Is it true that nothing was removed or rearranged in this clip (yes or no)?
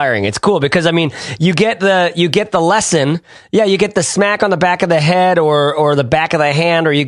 yes